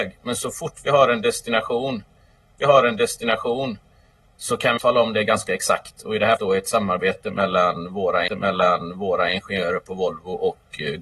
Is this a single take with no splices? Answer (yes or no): no